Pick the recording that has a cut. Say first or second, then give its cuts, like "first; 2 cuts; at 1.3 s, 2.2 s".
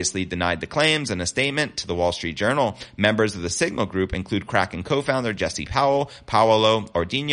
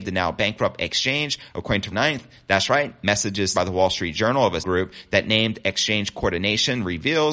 second; 3 cuts; at 1.9 s, 3.5 s, 4.6 s